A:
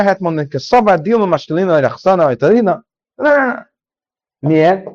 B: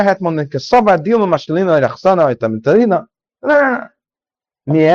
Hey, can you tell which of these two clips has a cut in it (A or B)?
A